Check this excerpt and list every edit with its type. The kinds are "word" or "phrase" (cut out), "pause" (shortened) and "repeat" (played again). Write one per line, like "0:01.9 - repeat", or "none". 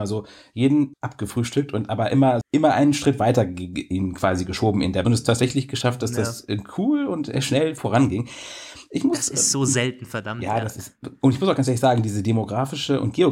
0:00.9 - word
0:02.4 - phrase
0:05.0 - phrase